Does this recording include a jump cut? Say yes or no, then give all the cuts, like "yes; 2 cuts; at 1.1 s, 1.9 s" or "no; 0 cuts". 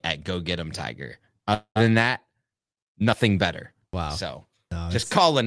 no; 0 cuts